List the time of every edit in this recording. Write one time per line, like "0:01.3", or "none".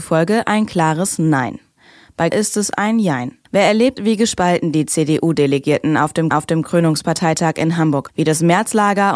0:02.3
0:03.5
0:04.0
0:06.3
0:08.1